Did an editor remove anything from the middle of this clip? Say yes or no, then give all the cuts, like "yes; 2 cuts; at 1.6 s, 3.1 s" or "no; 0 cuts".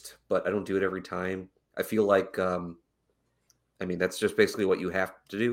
no; 0 cuts